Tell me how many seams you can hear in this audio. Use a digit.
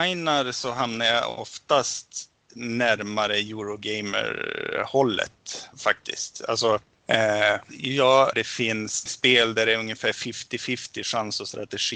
4